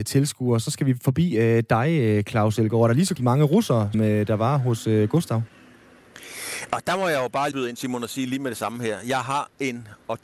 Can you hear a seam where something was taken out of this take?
yes; 3 cuts; at 3.2 s, 3.9 s, 7.5 s

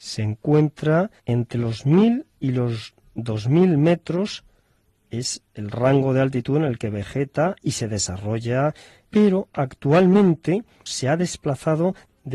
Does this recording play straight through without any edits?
yes; 0 cuts

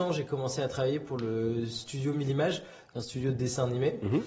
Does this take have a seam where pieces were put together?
no; 0 cuts

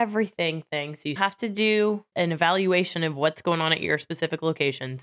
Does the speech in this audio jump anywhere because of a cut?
yes; 2 cuts; at 1.2 s, 2.1 s

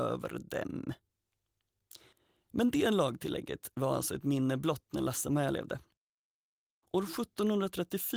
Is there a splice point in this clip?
yes; 1 cut; at 2.1 s

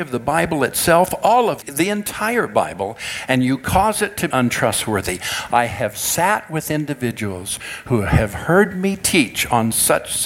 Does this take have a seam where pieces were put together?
yes; 2 cuts; at 1.6 s, 4.3 s

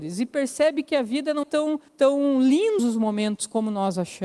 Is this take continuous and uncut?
no; 3 cuts; at 1.4 s, 1.9 s, 2.8 s

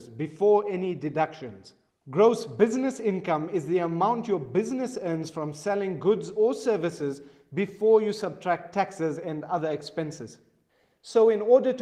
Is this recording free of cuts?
yes; 0 cuts

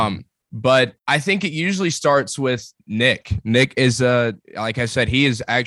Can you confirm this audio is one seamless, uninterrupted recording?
no; 3 cuts; at 1.0 s, 2.8 s, 4.4 s

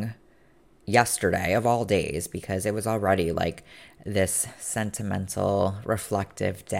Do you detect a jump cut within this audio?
no; 0 cuts

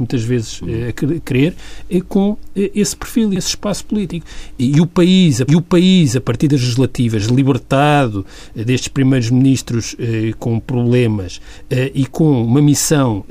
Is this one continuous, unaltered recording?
no; 2 cuts; at 3.4 s, 5.5 s

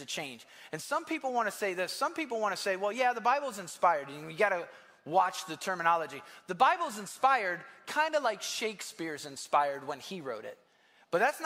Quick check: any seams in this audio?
no; 0 cuts

